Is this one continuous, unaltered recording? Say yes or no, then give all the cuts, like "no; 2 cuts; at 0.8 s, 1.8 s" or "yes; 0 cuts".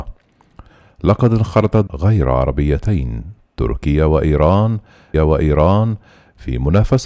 no; 2 cuts; at 1.9 s, 5.1 s